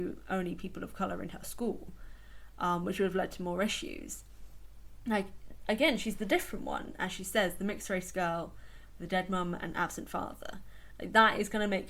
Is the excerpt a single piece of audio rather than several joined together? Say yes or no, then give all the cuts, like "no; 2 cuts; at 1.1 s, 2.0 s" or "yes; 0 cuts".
yes; 0 cuts